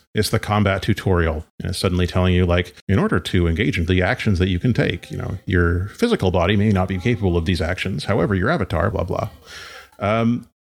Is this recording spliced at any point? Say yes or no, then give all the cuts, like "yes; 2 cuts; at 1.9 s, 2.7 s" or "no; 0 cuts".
yes; 4 cuts; at 1.5 s, 2.8 s, 3.9 s, 8.9 s